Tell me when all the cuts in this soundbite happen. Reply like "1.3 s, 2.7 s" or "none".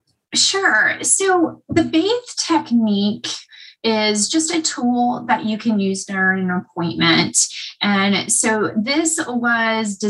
none